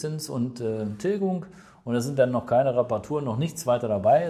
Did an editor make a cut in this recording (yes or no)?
no